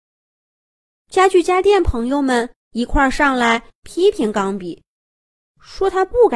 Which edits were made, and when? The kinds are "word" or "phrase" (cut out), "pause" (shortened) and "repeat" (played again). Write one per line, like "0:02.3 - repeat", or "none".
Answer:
0:02.6 - pause